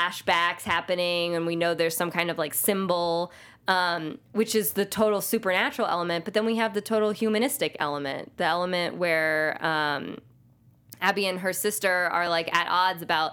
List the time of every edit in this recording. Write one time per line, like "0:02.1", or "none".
none

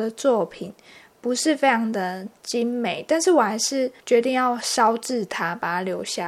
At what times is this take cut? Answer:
0:04.0

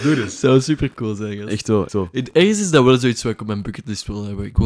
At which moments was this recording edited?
0:01.9

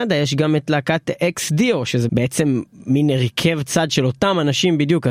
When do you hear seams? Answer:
0:02.1

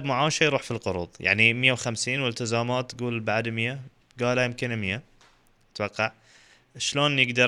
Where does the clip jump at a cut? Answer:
none

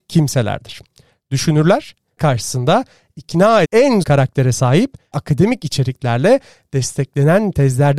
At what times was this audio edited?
0:02.2
0:03.6
0:04.0
0:05.1

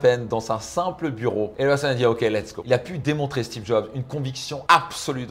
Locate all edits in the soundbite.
none

